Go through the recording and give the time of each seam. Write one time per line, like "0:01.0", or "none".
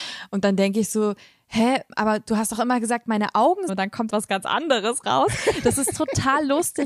0:03.7
0:04.1